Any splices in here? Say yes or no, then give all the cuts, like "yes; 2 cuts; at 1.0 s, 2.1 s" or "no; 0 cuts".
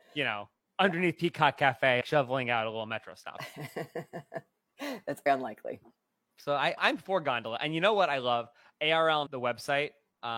yes; 4 cuts; at 2.0 s, 5.3 s, 6.8 s, 9.3 s